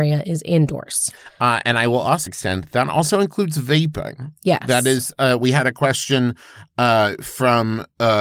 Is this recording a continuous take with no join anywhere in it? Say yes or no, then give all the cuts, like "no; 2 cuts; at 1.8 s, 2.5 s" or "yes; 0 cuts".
no; 1 cut; at 2.3 s